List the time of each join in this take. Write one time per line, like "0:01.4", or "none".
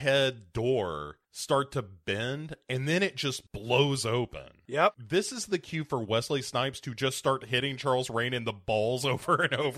none